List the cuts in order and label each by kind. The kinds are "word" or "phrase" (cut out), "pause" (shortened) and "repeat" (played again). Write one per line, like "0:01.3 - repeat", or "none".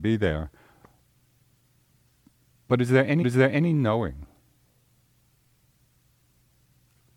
0:03.2 - repeat